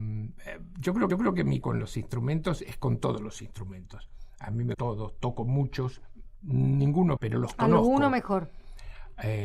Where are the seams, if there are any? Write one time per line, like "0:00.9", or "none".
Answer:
0:01.1
0:01.6
0:04.7
0:07.2